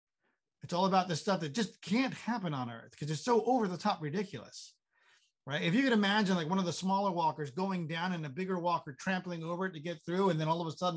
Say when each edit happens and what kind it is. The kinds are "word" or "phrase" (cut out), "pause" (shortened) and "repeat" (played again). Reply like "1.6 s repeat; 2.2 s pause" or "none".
none